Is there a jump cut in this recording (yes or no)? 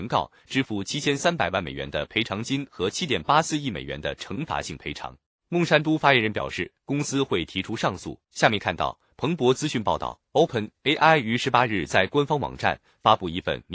yes